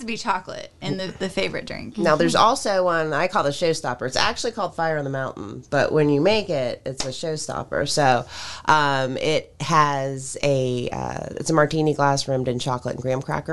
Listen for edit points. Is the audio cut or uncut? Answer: uncut